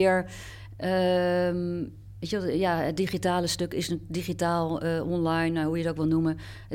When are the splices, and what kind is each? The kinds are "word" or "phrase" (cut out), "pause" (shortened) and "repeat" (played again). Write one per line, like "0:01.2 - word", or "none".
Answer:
none